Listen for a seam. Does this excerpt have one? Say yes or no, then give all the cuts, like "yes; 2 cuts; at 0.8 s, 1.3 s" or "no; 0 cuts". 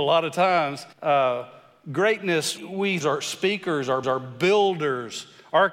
yes; 4 cuts; at 0.9 s, 2.6 s, 3.0 s, 4.0 s